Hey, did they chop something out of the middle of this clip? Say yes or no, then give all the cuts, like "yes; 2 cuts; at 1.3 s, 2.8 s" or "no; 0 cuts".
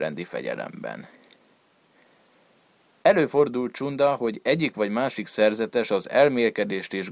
no; 0 cuts